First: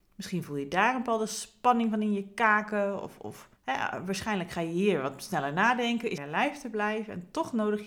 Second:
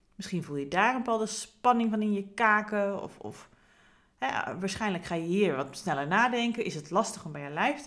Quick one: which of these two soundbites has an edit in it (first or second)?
first